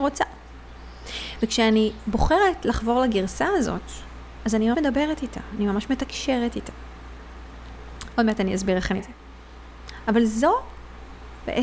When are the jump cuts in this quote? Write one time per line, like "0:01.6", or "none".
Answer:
0:04.7
0:09.0